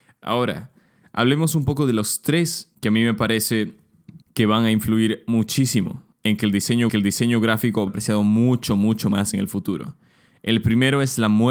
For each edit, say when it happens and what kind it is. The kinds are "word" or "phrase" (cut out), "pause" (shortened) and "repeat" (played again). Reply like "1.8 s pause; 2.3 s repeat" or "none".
2.7 s phrase; 4.2 s pause; 6.1 s pause; 6.9 s repeat; 7.9 s phrase